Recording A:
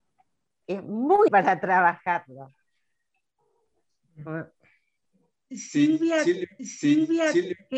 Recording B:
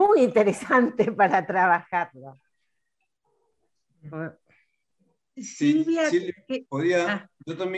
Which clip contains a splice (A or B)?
A